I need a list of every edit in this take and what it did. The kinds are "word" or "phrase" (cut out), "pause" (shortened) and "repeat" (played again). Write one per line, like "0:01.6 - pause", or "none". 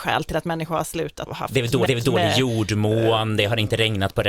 0:01.3 - phrase
0:01.9 - repeat